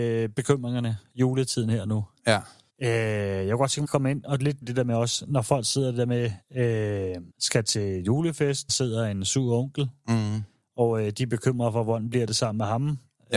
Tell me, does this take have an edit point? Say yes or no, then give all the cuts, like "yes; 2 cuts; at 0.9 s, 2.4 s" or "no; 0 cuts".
yes; 5 cuts; at 2.7 s, 3.8 s, 4.6 s, 7.3 s, 8.7 s